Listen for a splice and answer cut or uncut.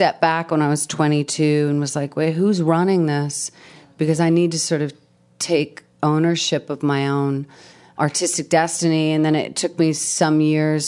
uncut